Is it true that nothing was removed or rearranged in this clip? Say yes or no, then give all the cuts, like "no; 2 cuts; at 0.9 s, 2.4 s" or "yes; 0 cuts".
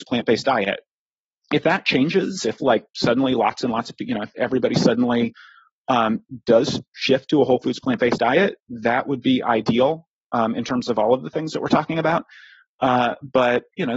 yes; 0 cuts